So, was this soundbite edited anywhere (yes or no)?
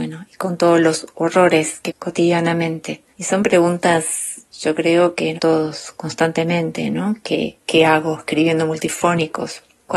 yes